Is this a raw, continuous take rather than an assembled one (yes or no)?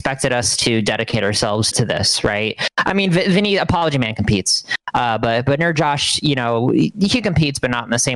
no